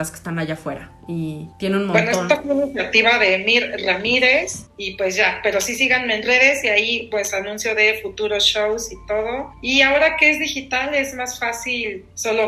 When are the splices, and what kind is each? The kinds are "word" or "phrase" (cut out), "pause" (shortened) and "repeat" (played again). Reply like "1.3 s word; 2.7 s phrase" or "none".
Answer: none

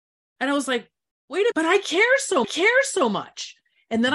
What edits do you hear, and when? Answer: 1.5 s word; 2.4 s repeat

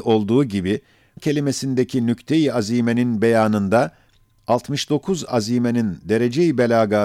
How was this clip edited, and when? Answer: 1.2 s word; 5.3 s word

